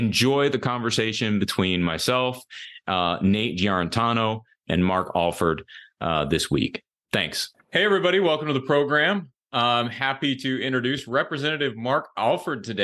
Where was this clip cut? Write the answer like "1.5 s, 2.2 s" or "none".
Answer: none